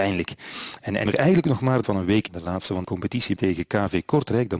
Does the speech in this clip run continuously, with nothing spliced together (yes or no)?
no